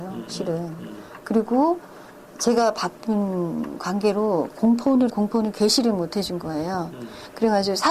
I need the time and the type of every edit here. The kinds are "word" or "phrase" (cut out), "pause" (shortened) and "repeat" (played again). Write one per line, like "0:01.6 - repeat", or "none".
0:05.1 - phrase